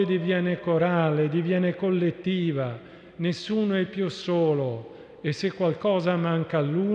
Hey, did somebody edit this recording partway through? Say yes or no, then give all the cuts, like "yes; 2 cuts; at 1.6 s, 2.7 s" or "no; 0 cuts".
no; 0 cuts